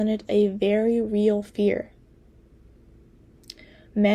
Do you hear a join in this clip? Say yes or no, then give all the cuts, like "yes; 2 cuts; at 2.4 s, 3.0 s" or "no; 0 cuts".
no; 0 cuts